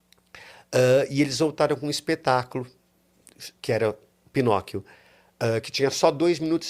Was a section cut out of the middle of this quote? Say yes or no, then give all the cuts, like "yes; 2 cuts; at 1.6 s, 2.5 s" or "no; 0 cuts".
no; 0 cuts